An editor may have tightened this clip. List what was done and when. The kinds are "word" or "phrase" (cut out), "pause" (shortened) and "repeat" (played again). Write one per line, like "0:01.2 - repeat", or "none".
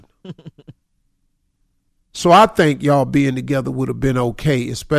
none